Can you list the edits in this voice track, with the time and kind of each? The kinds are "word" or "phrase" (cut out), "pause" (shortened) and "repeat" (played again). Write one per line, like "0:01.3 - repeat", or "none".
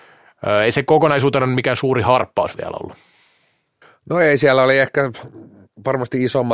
none